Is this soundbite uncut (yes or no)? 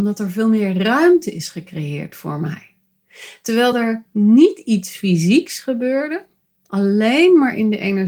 yes